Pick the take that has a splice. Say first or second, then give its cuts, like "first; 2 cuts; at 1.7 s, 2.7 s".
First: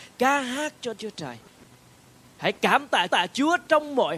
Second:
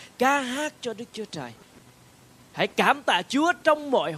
first; 2 cuts; at 0.9 s, 3.1 s